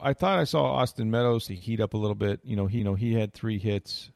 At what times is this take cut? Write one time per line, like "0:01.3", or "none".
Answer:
0:01.5
0:02.8

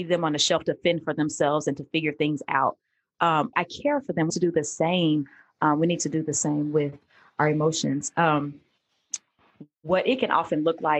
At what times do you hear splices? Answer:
0:03.5
0:04.3

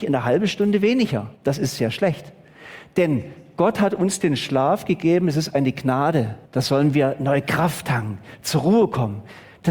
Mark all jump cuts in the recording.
0:01.4
0:06.5

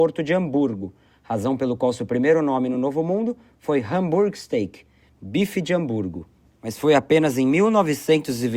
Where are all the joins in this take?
none

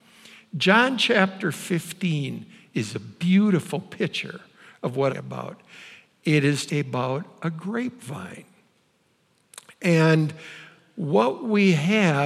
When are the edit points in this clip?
0:05.1
0:06.7

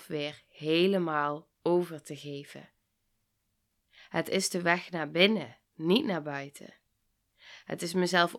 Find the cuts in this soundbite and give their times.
0:05.6

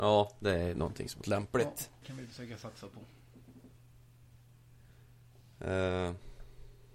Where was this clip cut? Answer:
0:01.2
0:02.0

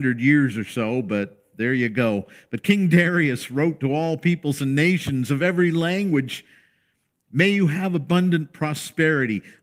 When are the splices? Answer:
none

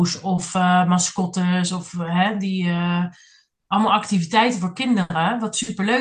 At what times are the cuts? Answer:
none

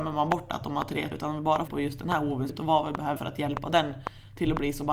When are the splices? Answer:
0:01.1
0:01.7
0:02.5
0:03.2

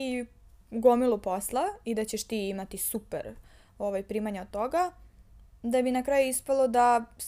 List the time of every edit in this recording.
none

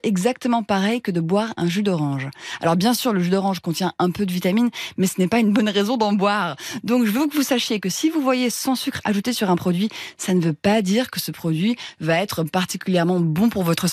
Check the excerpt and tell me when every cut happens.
none

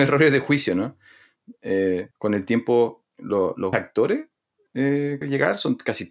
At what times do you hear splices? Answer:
0:02.1
0:03.1
0:03.7
0:05.2

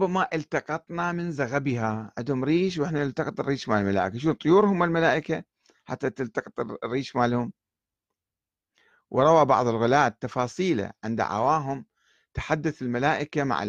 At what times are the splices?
none

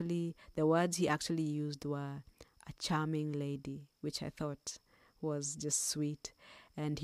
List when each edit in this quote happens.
none

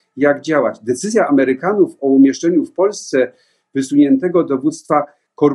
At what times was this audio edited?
none

